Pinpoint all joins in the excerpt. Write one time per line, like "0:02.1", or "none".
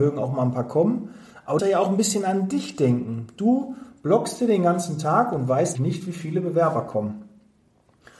0:01.6
0:05.7

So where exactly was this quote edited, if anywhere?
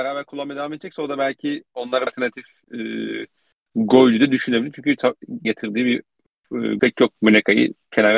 0:02.1
0:05.4
0:06.8
0:07.2

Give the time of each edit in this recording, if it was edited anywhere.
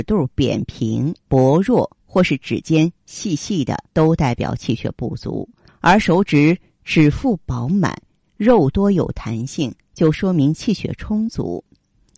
0:01.2
0:03.9
0:05.7

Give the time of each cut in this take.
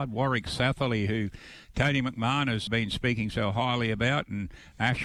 0:02.7

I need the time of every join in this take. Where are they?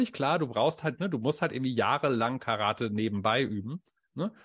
none

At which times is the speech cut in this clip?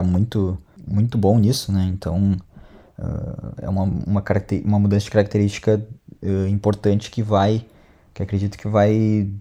none

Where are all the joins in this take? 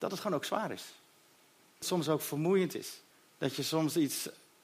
0:01.8
0:03.1

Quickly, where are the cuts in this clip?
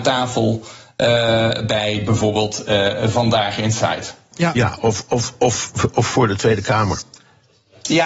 0:04.3

